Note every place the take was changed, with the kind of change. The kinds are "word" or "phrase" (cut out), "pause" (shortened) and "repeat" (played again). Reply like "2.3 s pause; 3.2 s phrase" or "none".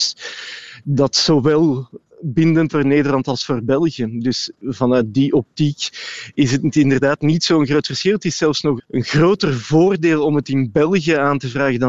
2.7 s word; 8.8 s word

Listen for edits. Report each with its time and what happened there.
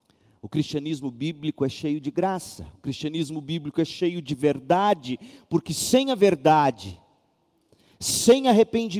none

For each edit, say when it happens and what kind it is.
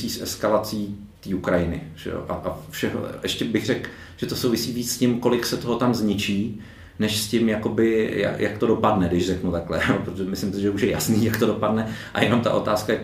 1.1 s pause

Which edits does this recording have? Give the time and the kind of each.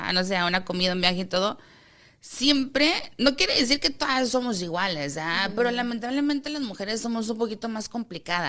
none

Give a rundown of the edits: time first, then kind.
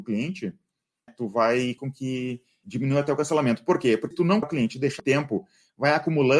1.1 s word; 1.8 s word; 2.6 s word; 4.1 s word; 4.4 s word; 5.0 s word

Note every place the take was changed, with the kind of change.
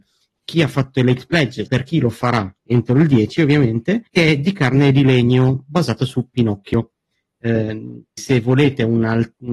1.7 s word; 2.6 s pause; 4.1 s pause; 8.2 s word

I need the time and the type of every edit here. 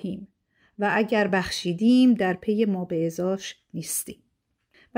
none

